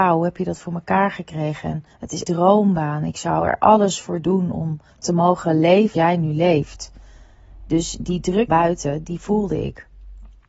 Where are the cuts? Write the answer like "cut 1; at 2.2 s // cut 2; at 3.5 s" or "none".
cut 1; at 1.9 s // cut 2; at 2.2 s // cut 3; at 4.9 s // cut 4; at 5.9 s // cut 5; at 8.5 s